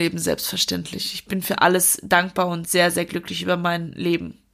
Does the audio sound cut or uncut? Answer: uncut